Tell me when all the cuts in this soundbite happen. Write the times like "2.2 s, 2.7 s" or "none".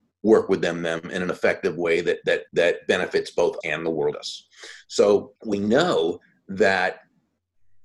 2.5 s, 3.6 s, 4.1 s, 5.4 s